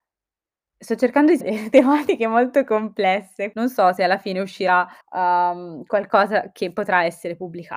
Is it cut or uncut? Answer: cut